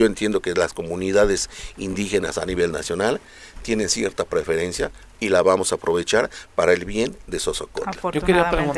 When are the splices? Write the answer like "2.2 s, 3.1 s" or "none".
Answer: none

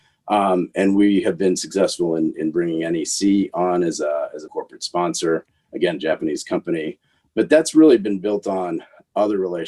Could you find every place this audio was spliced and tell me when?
4.5 s

